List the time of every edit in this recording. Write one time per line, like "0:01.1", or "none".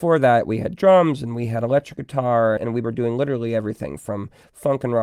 0:02.6